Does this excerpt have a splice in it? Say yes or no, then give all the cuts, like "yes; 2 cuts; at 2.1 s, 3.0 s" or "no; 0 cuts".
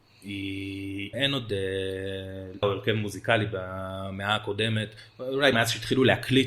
yes; 3 cuts; at 1.1 s, 2.6 s, 5.5 s